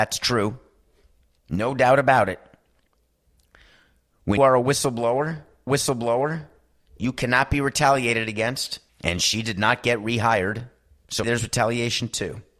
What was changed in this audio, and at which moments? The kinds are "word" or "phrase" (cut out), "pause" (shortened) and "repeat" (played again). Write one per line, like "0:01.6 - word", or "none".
0:04.4 - word
0:05.7 - repeat
0:08.9 - pause
0:11.2 - word